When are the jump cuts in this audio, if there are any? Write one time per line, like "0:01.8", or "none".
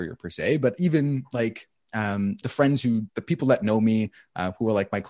0:03.1